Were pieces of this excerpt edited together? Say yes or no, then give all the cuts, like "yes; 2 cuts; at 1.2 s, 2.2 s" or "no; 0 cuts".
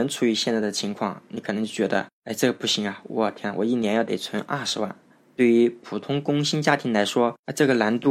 no; 0 cuts